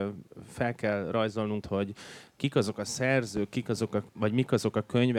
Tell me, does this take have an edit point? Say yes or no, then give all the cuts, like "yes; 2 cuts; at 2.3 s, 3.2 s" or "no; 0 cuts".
yes; 1 cut; at 1.6 s